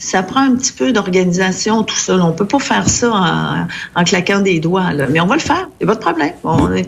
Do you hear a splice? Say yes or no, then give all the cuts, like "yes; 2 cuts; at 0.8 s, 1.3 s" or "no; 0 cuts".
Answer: no; 0 cuts